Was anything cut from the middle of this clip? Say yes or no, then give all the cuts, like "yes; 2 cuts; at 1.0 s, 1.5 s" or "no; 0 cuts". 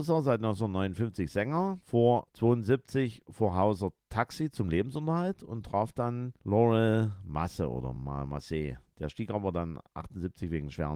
no; 0 cuts